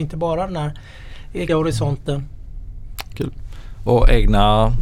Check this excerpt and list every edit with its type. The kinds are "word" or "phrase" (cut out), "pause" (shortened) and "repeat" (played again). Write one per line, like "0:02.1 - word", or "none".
0:01.5 - word